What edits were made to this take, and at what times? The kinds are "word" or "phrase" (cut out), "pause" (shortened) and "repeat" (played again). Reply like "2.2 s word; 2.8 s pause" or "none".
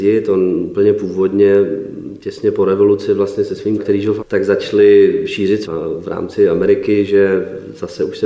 3.8 s word; 4.2 s word; 5.6 s word

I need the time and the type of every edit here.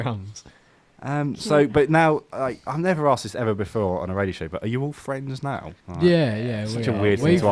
5.8 s pause

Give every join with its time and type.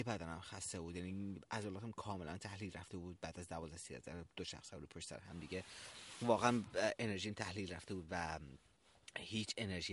none

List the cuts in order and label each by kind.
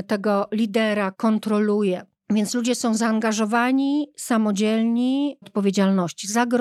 1.1 s word; 2.1 s pause; 5.4 s phrase

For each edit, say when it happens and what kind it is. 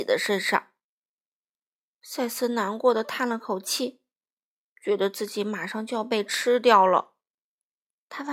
none

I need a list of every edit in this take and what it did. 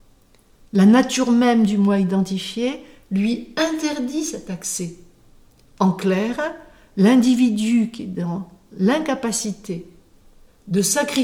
none

